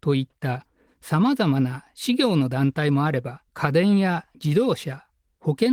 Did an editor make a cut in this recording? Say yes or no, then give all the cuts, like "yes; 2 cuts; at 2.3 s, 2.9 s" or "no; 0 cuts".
yes; 2 cuts; at 3.5 s, 4.3 s